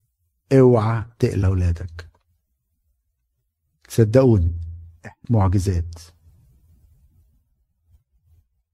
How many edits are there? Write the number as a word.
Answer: two